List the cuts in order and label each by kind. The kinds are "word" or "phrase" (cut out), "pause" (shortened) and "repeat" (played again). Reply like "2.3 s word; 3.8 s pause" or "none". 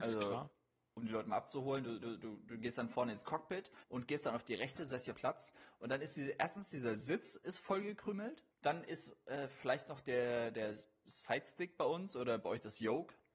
2.0 s repeat; 3.8 s pause; 4.8 s word; 5.1 s phrase; 8.5 s pause